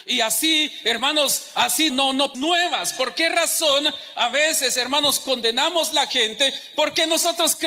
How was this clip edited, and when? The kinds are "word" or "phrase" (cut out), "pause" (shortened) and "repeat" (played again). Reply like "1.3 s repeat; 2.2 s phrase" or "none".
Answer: 1.9 s word; 2.3 s phrase